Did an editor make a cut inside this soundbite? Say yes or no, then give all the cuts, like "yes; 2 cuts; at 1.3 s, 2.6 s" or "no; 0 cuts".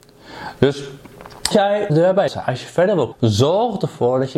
yes; 4 cuts; at 1.5 s, 1.9 s, 2.3 s, 3.1 s